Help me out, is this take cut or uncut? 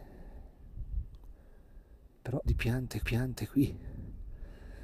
cut